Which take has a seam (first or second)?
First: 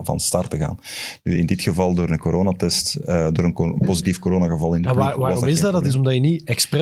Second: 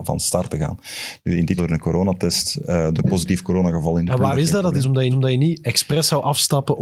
second